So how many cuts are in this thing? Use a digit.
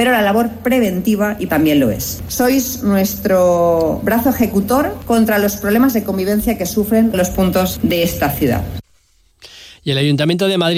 2